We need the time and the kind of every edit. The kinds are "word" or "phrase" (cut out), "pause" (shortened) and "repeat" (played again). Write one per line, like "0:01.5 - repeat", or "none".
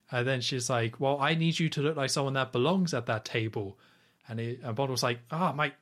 none